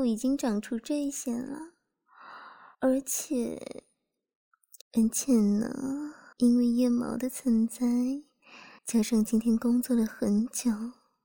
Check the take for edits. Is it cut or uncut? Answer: cut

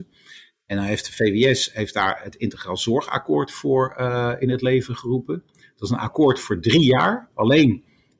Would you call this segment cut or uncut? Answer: uncut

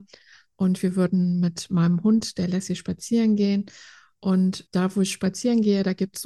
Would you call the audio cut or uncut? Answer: cut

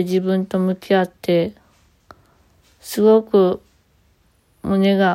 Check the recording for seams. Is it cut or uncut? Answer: uncut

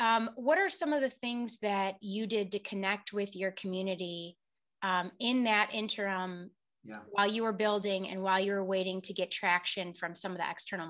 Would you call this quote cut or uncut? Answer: uncut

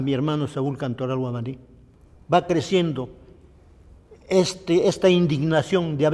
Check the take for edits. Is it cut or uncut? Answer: uncut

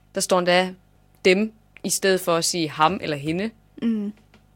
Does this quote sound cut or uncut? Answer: uncut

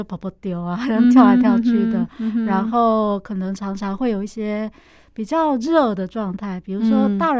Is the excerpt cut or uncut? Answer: uncut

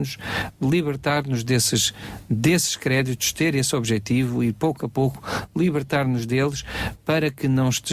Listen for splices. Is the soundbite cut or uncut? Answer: uncut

